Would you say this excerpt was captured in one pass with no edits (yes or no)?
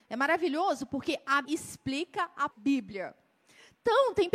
no